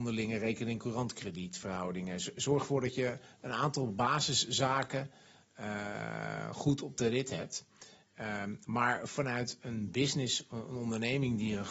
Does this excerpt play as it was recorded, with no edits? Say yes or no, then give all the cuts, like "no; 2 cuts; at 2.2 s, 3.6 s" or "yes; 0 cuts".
yes; 0 cuts